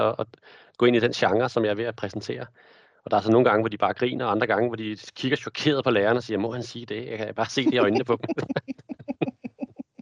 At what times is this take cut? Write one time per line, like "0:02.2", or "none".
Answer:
none